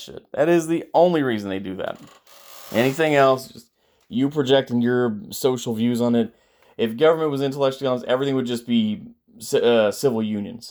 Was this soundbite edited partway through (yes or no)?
no